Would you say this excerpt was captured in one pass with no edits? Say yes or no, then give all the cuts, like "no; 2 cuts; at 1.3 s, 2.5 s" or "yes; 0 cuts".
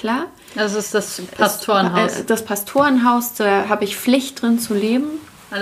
yes; 0 cuts